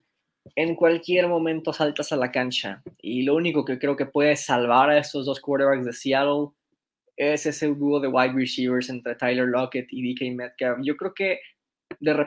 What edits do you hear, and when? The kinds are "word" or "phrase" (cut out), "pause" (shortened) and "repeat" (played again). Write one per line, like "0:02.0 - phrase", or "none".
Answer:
none